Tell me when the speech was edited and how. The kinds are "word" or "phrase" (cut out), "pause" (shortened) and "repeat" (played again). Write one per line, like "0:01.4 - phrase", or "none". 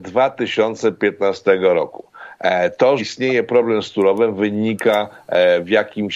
0:03.0 - word

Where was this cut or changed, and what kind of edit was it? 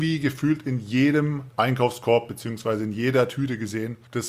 none

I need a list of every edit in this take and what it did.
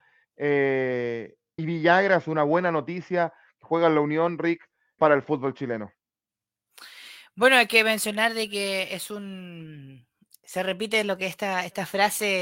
0:01.6 - word
0:05.0 - word

